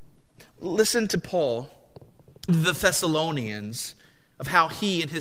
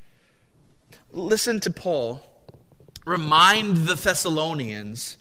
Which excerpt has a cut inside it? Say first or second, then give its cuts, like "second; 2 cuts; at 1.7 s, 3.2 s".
first; 1 cut; at 2.5 s